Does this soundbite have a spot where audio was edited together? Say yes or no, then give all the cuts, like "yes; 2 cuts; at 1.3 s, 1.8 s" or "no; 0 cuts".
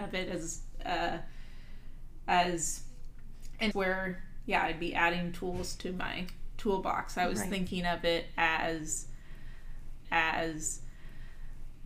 yes; 2 cuts; at 3.7 s, 10.0 s